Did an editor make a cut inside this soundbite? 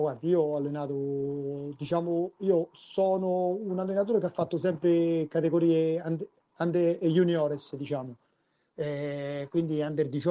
no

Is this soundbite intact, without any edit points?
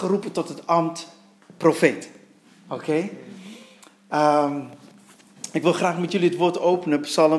yes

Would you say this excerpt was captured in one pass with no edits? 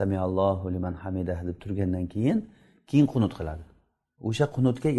yes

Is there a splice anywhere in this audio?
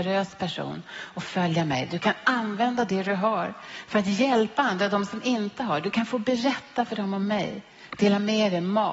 no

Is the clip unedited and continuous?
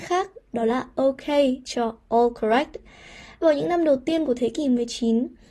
yes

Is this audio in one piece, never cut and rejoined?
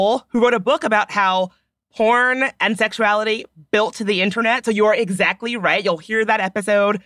yes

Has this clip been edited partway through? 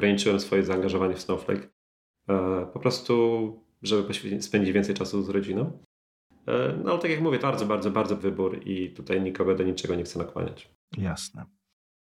yes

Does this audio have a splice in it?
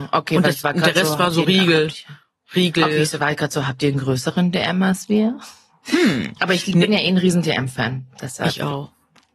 no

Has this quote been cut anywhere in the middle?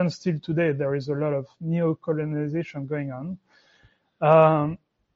no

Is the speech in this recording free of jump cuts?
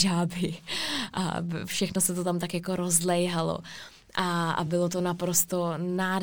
yes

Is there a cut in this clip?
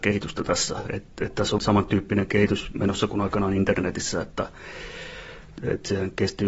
yes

